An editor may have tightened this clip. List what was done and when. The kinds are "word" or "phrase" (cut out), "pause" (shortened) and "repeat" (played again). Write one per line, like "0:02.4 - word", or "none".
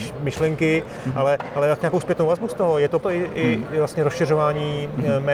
0:01.8 - word
0:03.0 - word
0:03.6 - word